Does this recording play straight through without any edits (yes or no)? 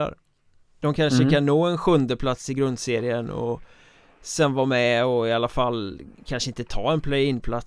yes